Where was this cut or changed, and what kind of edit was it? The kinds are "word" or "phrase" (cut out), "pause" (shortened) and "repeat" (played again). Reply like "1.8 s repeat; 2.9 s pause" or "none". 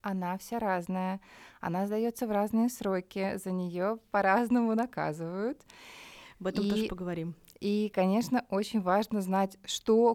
none